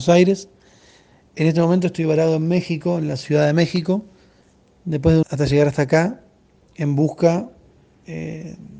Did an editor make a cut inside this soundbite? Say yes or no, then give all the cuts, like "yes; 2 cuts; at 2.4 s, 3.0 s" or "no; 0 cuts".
yes; 1 cut; at 5.2 s